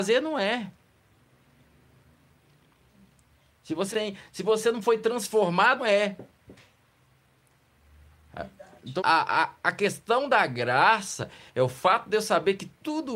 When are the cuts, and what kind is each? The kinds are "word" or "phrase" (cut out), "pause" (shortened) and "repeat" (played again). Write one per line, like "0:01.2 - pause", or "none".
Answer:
0:03.9 - word
0:05.8 - word
0:09.0 - word